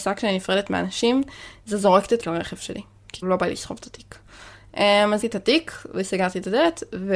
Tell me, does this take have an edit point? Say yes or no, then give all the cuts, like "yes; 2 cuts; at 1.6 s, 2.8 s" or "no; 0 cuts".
yes; 3 cuts; at 2.2 s, 3.2 s, 5.2 s